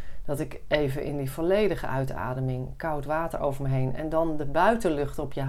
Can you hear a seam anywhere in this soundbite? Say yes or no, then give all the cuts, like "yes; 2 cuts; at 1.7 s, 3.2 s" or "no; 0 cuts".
no; 0 cuts